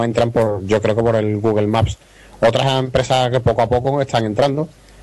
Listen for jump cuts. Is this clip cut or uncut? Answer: cut